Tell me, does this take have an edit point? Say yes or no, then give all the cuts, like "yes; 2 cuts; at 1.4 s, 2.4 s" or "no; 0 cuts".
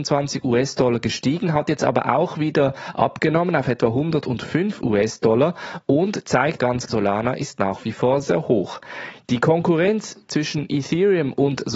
yes; 2 cuts; at 6.6 s, 6.9 s